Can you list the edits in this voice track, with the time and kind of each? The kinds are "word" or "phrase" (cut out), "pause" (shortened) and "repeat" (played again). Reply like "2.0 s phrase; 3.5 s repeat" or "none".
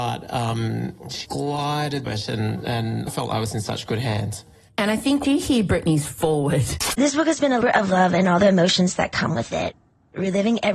1.2 s word; 2.1 s word; 3.1 s word; 5.2 s word; 7.6 s word